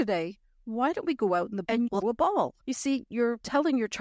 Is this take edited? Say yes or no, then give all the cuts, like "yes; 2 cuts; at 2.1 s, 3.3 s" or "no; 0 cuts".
yes; 3 cuts; at 1.6 s, 2.0 s, 2.6 s